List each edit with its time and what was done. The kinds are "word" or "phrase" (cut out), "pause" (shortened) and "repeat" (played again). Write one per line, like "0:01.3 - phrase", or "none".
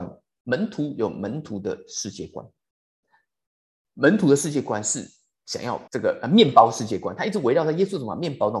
0:05.9 - pause